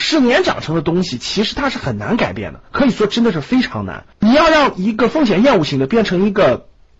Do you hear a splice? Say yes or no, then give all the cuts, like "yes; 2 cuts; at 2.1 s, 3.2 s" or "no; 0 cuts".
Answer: yes; 2 cuts; at 2.7 s, 4.1 s